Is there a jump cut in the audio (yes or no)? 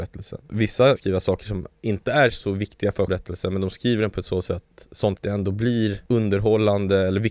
yes